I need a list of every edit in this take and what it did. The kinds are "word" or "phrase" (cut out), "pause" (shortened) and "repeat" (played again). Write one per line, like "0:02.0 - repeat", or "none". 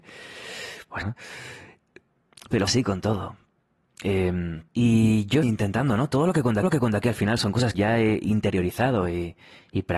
0:01.0 - word
0:02.7 - word
0:04.7 - pause
0:05.4 - word
0:06.6 - repeat
0:07.7 - word